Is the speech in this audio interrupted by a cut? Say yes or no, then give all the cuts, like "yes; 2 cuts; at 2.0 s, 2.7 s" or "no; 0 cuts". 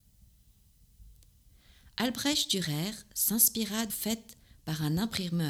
yes; 1 cut; at 3.9 s